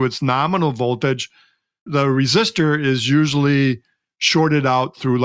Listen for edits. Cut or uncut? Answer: uncut